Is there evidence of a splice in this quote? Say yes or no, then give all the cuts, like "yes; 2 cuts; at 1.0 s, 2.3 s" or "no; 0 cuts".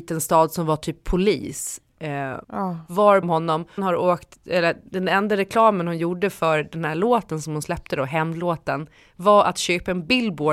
yes; 4 cuts; at 2.4 s, 3.2 s, 3.8 s, 4.9 s